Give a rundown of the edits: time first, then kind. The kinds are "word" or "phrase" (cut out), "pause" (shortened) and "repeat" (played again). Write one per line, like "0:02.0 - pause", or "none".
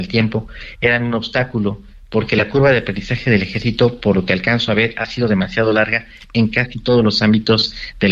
none

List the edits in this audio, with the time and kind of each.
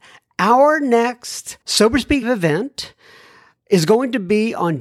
0:01.6 - pause
0:02.2 - word

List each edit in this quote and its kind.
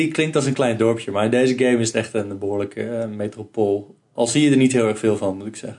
none

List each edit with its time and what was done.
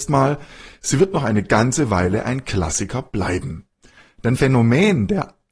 0:04.3 - word

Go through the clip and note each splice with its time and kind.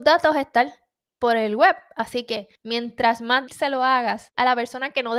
0:02.6 - pause
0:03.5 - word

